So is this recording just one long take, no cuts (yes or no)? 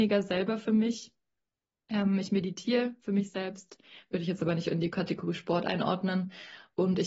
yes